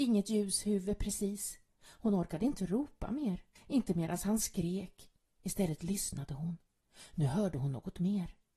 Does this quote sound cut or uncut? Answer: cut